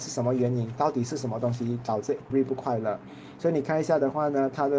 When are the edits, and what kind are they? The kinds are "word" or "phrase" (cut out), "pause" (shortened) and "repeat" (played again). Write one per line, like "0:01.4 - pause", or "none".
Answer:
0:02.3 - word